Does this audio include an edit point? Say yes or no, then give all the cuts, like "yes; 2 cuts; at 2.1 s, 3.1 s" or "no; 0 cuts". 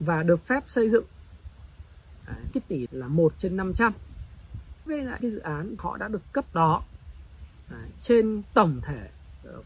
yes; 6 cuts; at 2.5 s, 2.9 s, 4.9 s, 5.2 s, 5.8 s, 6.5 s